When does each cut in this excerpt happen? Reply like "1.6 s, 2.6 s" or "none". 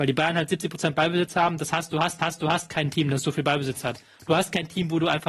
2.2 s